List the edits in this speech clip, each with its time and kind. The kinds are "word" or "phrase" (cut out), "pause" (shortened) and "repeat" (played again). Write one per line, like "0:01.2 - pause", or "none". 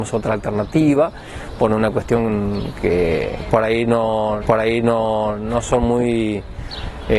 0:04.4 - repeat